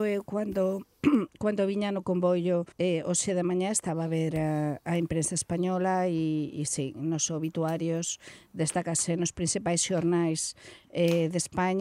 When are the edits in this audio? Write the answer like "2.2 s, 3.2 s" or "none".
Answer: 2.7 s